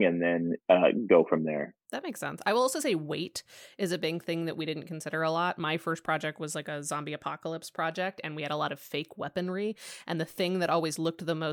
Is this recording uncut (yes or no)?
yes